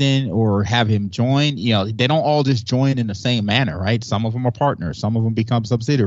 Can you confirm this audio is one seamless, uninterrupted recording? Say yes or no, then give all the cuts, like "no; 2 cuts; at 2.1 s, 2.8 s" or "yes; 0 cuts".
yes; 0 cuts